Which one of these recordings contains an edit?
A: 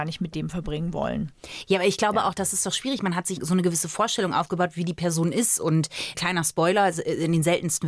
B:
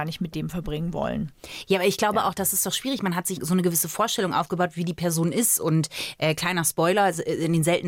A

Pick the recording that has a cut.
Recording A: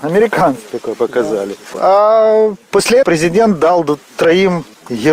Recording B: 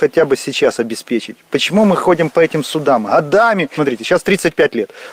A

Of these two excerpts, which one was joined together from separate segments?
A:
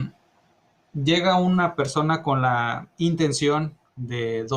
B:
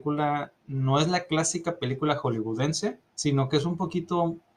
B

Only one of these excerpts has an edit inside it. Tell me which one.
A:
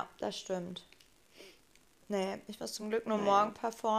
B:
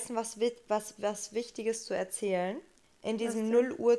B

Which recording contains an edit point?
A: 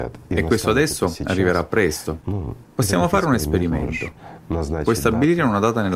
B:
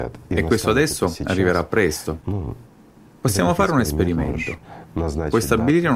A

